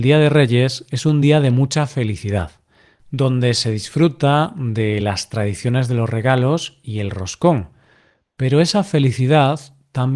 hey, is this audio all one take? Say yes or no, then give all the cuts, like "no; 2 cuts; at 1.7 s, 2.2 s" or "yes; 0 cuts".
yes; 0 cuts